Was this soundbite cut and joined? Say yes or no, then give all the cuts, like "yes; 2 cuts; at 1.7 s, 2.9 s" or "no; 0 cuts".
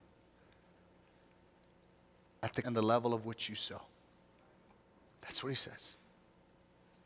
yes; 1 cut; at 2.6 s